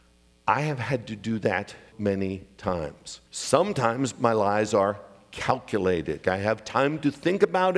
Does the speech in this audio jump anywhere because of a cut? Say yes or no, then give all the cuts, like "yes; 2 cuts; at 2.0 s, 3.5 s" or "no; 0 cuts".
yes; 3 cuts; at 1.9 s, 3.3 s, 6.2 s